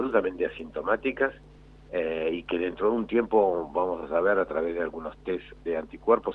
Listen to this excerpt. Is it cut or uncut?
uncut